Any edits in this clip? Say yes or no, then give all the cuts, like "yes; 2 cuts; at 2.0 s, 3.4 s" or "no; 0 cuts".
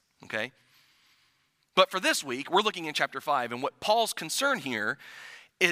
no; 0 cuts